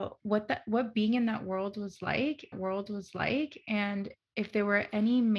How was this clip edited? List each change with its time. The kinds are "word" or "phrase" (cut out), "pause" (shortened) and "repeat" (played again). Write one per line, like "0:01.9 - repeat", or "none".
0:02.5 - repeat